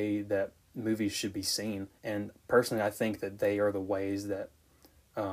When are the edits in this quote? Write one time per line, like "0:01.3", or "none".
0:02.0